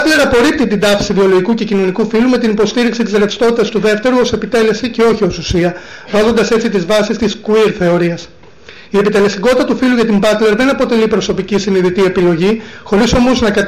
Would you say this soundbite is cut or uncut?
uncut